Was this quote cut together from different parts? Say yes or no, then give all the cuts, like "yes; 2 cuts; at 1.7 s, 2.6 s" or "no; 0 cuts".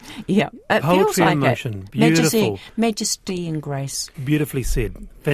yes; 1 cut; at 4.1 s